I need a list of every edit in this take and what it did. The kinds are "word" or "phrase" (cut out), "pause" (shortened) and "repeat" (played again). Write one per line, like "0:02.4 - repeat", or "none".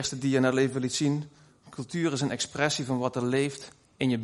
none